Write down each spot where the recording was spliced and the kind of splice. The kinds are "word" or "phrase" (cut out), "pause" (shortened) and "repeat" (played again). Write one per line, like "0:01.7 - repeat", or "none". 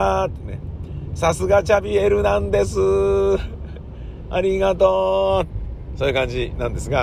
none